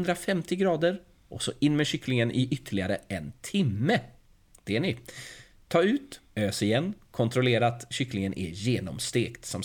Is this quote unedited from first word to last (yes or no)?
yes